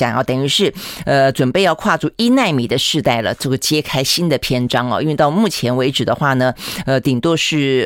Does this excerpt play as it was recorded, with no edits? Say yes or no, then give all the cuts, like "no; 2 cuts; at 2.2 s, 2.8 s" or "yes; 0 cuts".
yes; 0 cuts